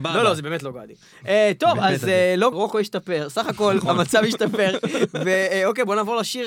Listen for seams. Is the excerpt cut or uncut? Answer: cut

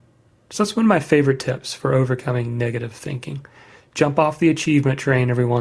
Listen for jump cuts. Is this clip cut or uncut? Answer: uncut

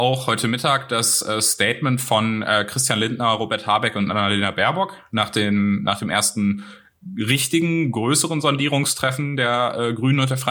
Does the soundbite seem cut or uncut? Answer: uncut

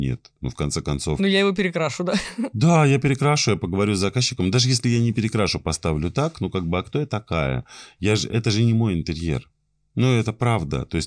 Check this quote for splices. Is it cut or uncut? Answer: uncut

